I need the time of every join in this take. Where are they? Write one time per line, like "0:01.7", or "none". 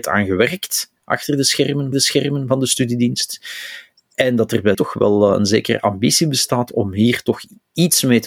0:01.0
0:01.9
0:04.7